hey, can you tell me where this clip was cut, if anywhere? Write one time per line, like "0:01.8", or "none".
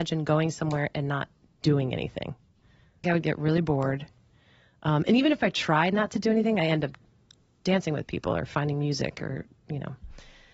0:03.0